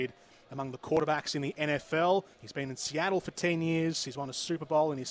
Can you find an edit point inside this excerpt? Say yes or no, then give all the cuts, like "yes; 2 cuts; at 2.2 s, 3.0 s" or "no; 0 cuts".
yes; 1 cut; at 2.3 s